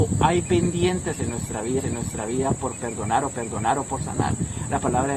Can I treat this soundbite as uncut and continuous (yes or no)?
no